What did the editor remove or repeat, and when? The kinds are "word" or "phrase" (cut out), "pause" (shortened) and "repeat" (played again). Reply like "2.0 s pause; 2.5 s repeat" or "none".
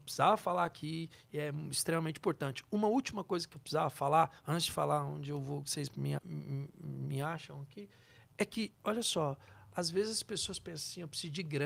6.2 s word; 8.3 s word; 8.8 s pause